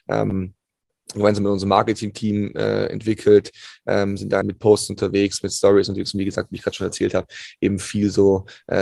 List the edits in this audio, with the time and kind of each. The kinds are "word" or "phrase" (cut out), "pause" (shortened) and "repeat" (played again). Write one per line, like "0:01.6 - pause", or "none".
0:04.4 - phrase